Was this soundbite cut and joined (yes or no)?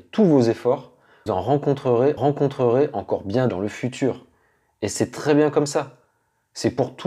yes